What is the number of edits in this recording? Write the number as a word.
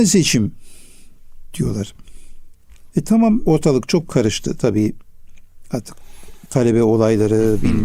two